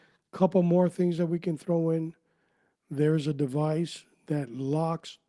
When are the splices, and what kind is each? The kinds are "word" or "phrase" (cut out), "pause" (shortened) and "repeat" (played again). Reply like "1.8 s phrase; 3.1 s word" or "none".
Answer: none